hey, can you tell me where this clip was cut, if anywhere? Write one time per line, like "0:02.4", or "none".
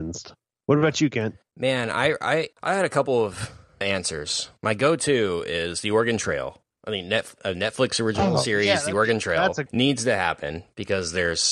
0:01.5
0:02.5
0:03.8
0:09.7